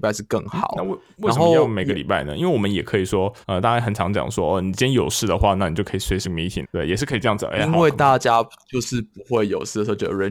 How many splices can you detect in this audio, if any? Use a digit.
3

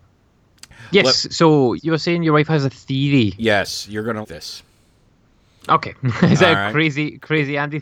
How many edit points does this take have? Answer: 2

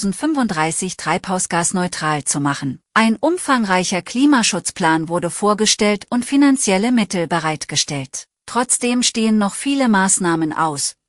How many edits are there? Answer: 2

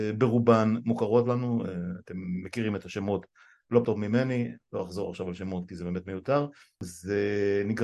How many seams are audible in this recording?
1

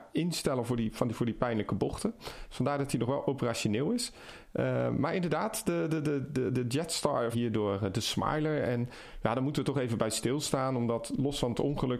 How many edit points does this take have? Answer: 1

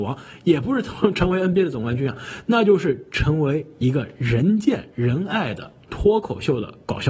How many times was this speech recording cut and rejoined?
0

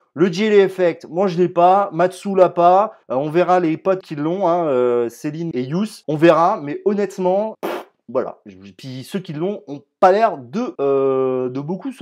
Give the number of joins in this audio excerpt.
6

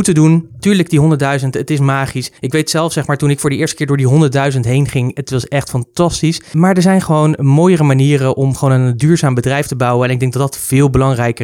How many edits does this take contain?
1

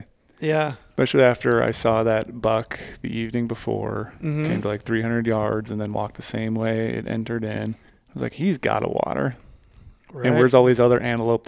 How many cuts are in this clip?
1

